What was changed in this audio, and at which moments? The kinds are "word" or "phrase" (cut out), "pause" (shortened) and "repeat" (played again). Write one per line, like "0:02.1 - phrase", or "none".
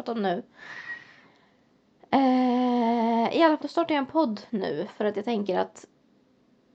0:03.6 - word

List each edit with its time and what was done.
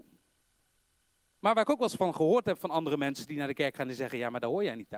none

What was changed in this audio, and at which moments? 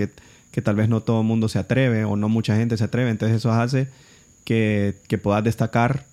none

